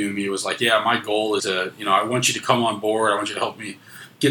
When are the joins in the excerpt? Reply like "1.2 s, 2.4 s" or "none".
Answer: 1.4 s